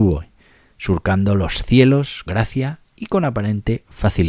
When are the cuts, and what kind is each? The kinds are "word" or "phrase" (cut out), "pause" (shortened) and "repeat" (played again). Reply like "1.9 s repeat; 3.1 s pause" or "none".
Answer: 2.3 s word; 2.9 s pause